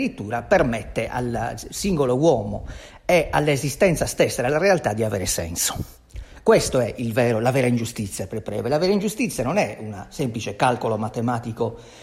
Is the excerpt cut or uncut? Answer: uncut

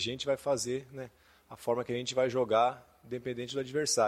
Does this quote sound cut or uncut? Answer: uncut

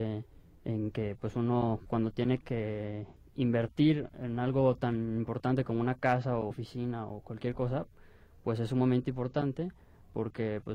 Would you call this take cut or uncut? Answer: cut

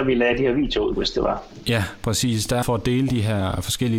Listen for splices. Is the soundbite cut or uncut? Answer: cut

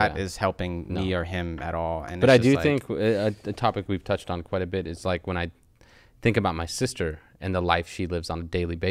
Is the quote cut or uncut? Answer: uncut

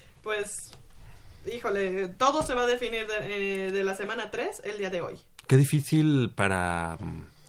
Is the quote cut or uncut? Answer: uncut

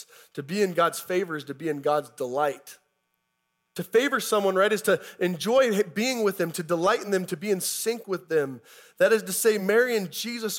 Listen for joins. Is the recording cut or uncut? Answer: uncut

